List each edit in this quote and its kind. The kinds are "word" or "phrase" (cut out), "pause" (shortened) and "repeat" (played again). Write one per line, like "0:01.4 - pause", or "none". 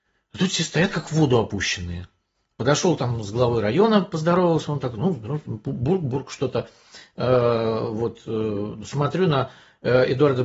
none